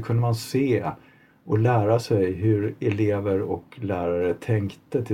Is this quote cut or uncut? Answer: uncut